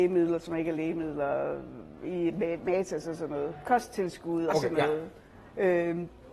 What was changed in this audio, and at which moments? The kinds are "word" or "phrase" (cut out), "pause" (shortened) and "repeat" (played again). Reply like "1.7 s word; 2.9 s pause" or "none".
4.5 s word